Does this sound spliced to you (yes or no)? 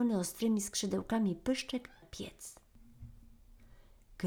yes